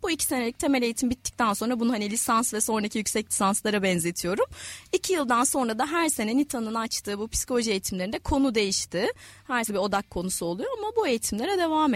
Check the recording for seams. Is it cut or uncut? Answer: cut